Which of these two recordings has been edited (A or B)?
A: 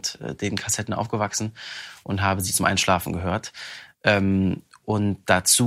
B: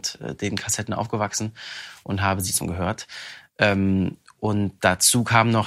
B